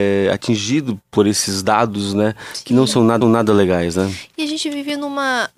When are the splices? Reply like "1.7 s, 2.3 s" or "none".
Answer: 3.2 s